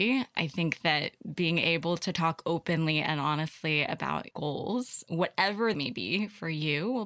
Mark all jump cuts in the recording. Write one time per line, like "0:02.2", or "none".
0:04.3
0:05.7